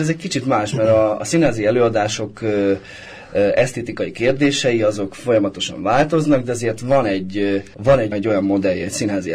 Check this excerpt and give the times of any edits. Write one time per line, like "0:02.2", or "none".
0:07.7
0:08.1